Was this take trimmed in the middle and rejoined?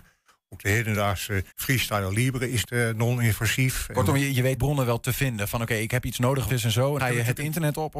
yes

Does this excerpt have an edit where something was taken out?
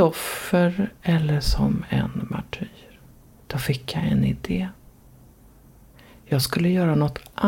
no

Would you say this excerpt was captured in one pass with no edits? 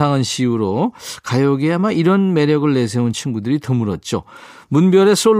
yes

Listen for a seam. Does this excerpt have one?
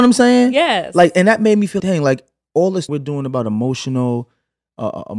yes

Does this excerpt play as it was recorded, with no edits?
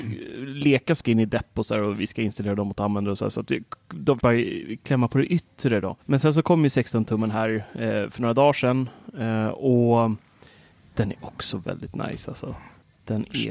no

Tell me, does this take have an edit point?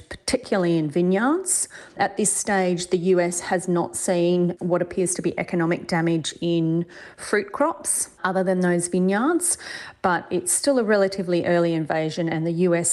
yes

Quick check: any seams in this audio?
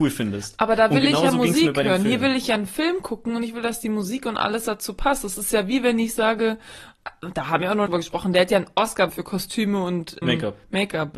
yes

